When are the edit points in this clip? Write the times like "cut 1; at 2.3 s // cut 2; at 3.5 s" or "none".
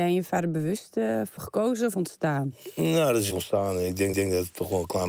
cut 1; at 1.4 s // cut 2; at 1.9 s // cut 3; at 3.3 s // cut 4; at 4.1 s